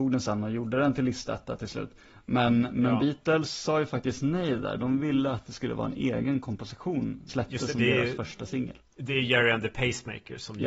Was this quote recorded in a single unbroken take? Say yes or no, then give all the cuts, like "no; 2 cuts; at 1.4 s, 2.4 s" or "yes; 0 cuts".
no; 1 cut; at 7.3 s